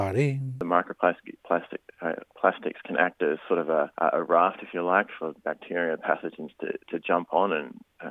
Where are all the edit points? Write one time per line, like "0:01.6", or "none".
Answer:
0:01.4
0:03.9